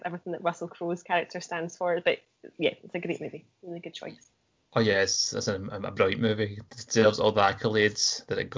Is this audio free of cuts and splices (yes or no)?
yes